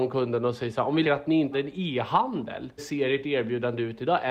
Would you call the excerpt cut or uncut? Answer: cut